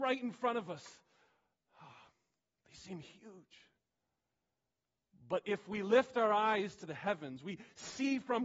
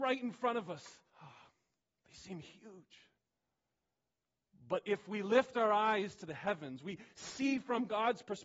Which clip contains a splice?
second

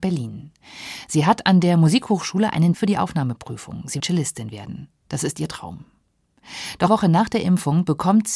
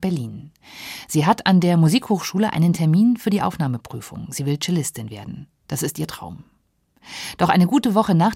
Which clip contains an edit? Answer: first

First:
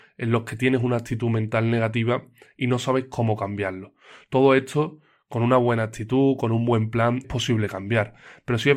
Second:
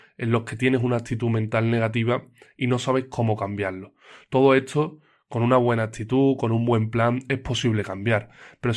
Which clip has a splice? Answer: first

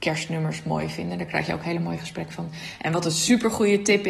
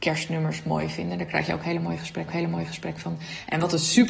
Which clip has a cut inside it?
second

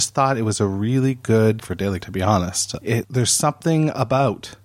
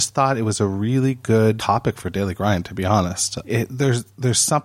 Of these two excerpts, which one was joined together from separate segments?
first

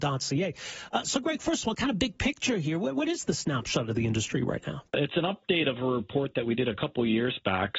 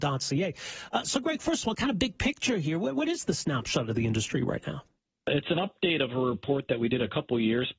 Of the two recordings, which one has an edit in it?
first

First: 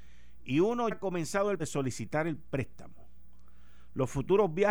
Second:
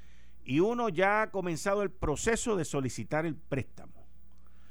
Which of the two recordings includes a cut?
first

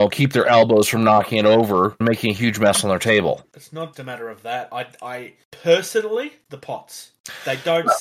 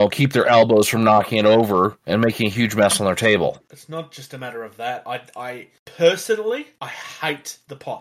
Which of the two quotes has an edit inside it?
first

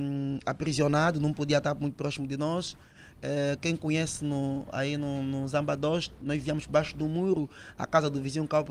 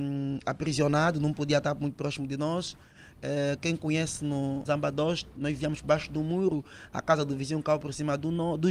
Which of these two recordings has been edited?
second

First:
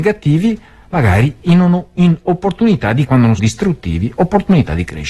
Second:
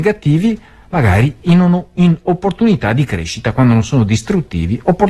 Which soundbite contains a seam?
first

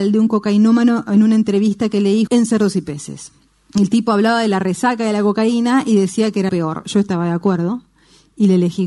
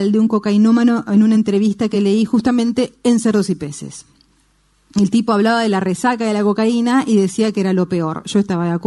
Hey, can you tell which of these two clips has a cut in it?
first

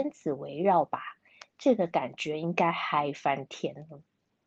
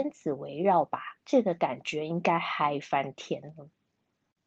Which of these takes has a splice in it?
second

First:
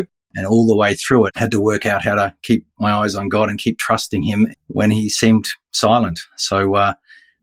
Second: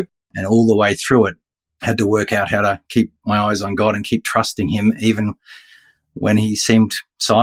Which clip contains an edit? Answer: first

